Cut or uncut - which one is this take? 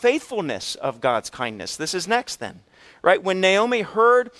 uncut